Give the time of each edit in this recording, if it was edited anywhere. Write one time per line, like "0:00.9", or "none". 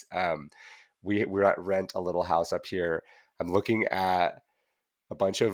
none